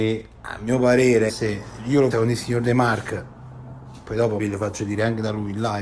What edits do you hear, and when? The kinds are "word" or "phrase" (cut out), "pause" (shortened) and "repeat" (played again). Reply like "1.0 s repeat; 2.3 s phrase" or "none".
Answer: 1.3 s word; 1.8 s word; 2.1 s word; 4.4 s word